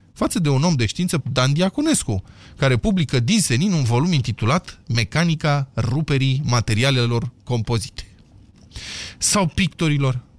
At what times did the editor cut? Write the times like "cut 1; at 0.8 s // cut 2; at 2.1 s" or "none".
cut 1; at 1.2 s